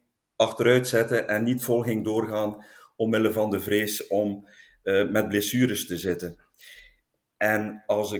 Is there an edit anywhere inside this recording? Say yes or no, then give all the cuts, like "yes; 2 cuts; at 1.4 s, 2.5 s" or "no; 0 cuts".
no; 0 cuts